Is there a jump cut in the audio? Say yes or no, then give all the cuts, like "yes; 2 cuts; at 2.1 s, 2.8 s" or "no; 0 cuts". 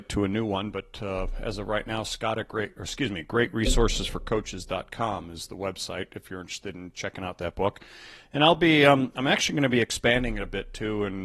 no; 0 cuts